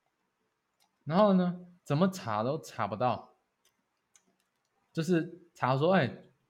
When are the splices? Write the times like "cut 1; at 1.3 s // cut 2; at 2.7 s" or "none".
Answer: cut 1; at 1.8 s // cut 2; at 4.7 s